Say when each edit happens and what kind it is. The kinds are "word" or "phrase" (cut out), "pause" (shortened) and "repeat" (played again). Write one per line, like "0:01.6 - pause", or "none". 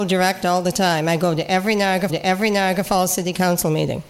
0:02.1 - repeat